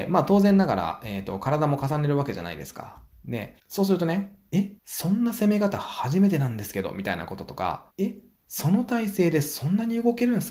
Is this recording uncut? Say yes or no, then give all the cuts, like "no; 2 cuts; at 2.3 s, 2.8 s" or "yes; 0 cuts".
no; 3 cuts; at 3.6 s, 4.8 s, 7.9 s